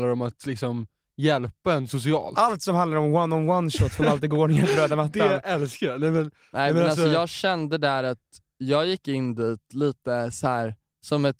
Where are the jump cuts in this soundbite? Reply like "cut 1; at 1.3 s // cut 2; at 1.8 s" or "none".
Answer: none